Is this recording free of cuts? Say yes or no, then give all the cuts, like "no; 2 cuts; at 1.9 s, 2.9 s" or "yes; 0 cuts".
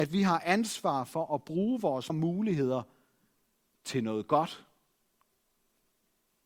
no; 1 cut; at 2.1 s